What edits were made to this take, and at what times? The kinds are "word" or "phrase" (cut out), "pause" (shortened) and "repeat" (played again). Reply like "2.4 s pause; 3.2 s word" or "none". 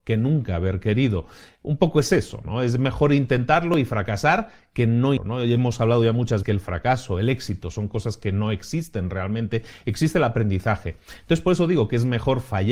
5.2 s word; 6.4 s word